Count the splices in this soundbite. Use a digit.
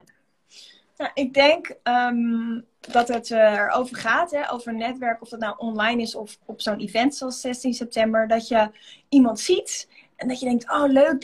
0